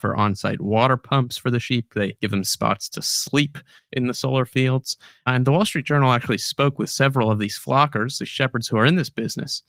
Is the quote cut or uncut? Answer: uncut